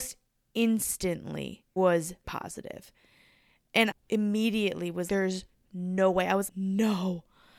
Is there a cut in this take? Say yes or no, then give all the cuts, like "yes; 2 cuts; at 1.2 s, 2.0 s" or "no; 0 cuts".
yes; 5 cuts; at 1.8 s, 2.2 s, 3.9 s, 5.1 s, 6.5 s